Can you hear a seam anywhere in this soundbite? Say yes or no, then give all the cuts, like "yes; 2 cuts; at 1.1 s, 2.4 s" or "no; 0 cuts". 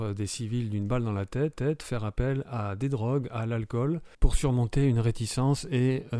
yes; 2 cuts; at 1.5 s, 4.1 s